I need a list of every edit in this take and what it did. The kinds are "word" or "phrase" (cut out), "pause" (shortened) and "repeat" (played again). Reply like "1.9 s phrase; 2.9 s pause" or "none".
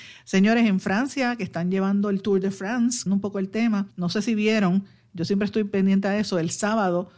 3.1 s word; 3.9 s pause